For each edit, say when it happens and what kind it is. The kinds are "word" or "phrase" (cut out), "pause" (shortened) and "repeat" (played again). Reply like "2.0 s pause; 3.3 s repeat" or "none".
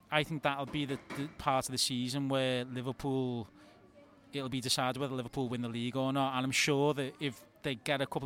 none